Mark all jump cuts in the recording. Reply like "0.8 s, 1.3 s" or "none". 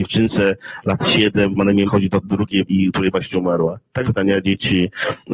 1.6 s, 1.9 s, 2.2 s, 2.7 s, 3.1 s, 4.0 s